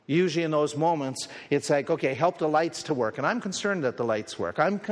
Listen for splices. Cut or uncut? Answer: uncut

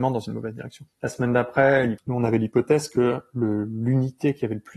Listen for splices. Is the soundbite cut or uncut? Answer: uncut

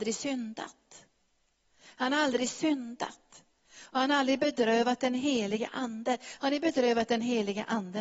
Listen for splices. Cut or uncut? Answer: uncut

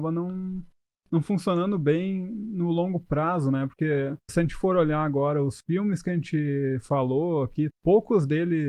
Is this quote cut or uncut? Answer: cut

